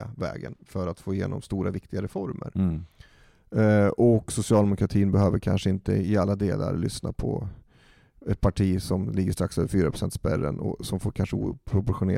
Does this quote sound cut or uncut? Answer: uncut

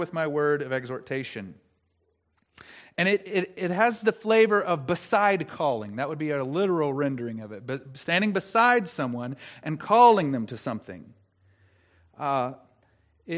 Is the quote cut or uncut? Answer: uncut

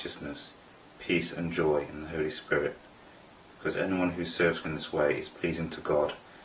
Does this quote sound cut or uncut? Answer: cut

